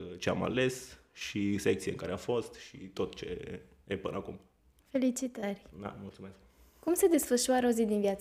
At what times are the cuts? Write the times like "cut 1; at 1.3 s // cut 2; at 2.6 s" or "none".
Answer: none